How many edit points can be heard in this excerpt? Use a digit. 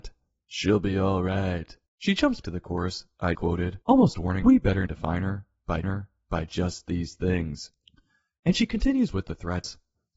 7